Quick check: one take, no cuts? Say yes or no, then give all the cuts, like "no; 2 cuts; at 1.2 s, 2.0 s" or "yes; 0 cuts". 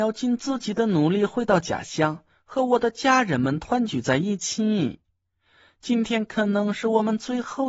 yes; 0 cuts